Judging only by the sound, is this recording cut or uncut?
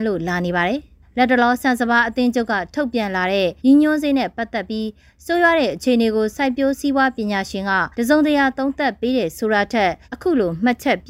cut